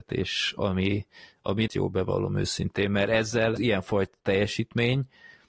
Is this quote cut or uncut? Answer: cut